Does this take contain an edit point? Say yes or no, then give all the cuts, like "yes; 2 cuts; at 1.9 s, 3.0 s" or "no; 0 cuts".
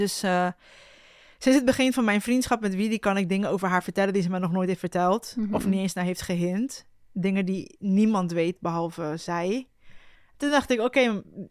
yes; 1 cut; at 10.1 s